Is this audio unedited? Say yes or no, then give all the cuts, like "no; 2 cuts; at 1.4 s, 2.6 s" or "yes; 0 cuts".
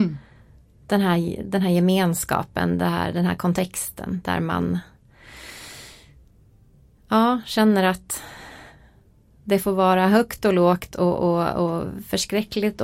yes; 0 cuts